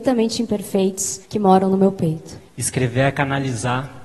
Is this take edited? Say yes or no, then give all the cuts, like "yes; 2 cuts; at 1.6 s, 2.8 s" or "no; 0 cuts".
yes; 2 cuts; at 1.2 s, 2.5 s